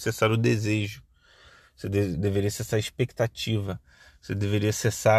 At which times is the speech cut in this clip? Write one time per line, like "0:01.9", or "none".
none